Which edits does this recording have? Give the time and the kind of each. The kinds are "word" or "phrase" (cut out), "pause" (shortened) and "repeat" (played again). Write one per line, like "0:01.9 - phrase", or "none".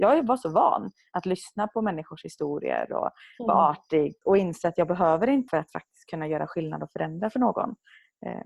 0:04.2 - word
0:05.5 - word